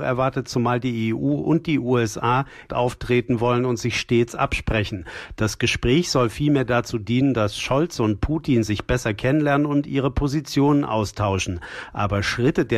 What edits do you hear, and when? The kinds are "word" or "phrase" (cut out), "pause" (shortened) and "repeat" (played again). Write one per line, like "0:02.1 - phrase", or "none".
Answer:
0:02.7 - phrase